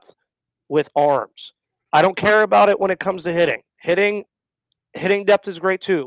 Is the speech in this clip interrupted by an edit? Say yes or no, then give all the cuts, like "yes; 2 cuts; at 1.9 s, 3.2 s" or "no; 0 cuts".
no; 0 cuts